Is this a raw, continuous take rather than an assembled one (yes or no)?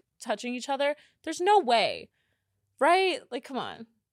yes